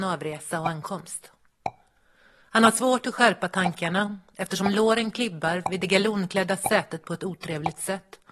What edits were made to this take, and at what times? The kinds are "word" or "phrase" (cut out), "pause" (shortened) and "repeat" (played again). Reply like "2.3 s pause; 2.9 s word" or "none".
none